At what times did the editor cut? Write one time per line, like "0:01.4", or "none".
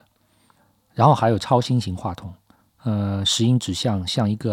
0:02.6